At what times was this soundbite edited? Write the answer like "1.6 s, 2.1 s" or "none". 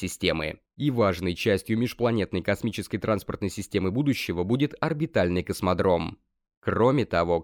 none